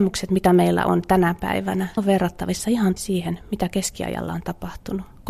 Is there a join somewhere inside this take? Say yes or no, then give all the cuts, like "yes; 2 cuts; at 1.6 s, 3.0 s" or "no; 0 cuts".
yes; 2 cuts; at 2.0 s, 3.0 s